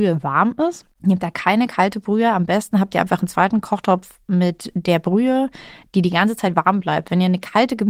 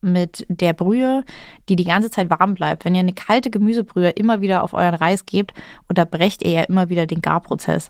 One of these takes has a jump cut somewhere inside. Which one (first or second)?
first